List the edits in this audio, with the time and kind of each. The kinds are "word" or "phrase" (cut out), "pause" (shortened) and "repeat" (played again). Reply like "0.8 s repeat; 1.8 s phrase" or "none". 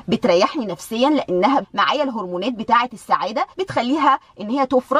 1.6 s word; 3.5 s pause